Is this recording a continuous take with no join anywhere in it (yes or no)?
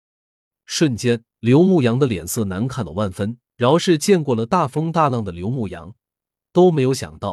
no